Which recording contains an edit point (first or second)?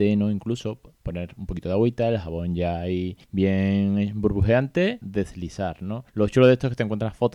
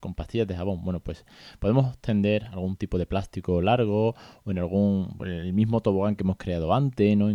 first